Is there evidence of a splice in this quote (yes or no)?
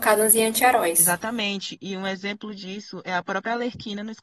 no